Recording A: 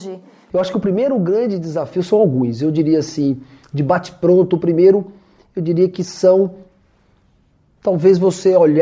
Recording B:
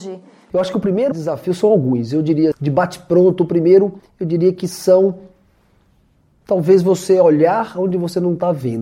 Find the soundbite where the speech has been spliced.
B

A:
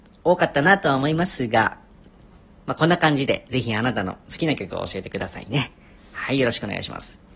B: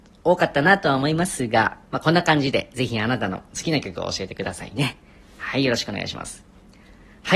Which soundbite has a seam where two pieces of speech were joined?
B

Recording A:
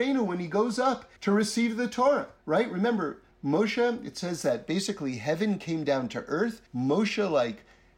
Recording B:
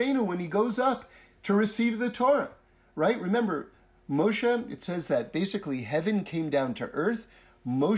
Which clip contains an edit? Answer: A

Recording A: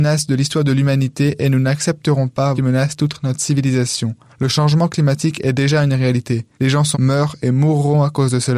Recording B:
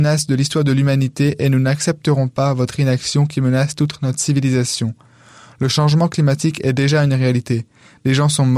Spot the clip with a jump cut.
A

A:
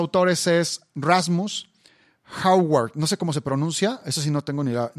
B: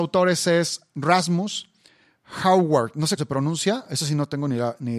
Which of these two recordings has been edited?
B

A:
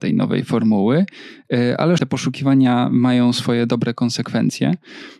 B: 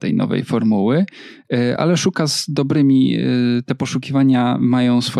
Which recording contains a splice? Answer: A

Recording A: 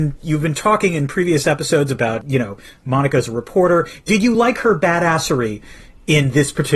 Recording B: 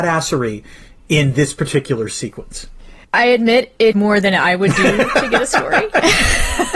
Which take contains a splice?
B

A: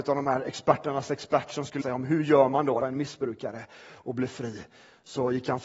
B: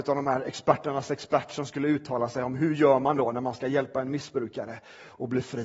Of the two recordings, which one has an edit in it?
A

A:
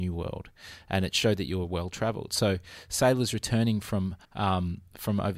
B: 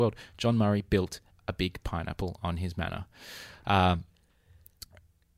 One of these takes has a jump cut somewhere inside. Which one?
A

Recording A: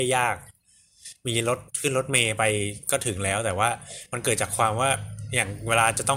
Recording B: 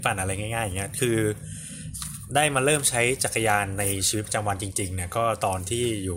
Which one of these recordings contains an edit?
A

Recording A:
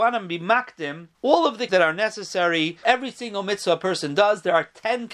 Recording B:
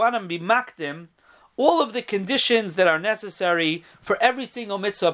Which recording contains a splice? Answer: A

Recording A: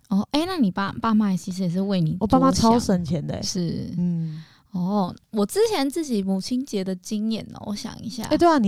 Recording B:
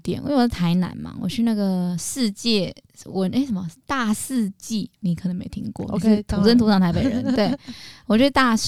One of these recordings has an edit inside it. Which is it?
B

